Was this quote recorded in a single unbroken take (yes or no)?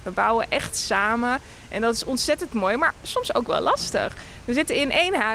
yes